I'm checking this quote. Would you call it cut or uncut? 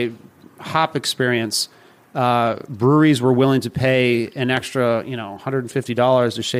uncut